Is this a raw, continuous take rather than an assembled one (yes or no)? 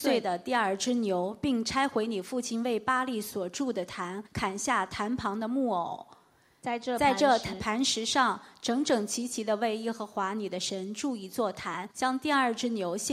no